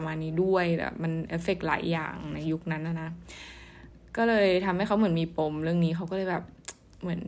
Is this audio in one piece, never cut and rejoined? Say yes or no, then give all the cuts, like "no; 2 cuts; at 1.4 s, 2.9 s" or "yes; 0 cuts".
yes; 0 cuts